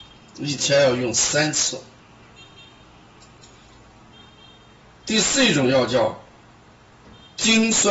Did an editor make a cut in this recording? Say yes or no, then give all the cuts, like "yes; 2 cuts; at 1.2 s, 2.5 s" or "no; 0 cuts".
no; 0 cuts